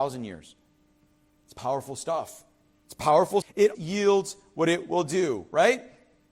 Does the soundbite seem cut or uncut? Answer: cut